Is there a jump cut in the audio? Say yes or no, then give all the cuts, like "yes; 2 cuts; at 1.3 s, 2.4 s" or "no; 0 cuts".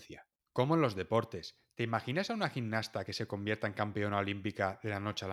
no; 0 cuts